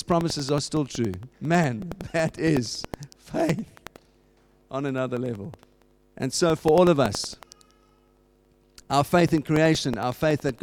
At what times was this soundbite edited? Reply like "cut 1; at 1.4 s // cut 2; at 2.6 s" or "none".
cut 1; at 1.3 s // cut 2; at 6.0 s